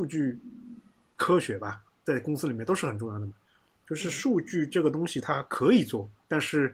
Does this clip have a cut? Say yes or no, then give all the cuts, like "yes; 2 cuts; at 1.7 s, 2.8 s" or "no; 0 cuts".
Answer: no; 0 cuts